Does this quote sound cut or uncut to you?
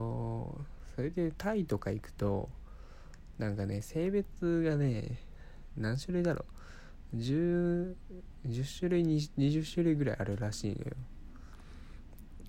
uncut